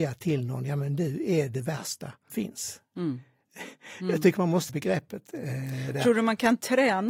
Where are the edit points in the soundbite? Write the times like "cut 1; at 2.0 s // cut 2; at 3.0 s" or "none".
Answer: cut 1; at 2.3 s // cut 2; at 4.7 s